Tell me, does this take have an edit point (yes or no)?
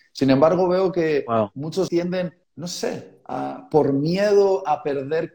yes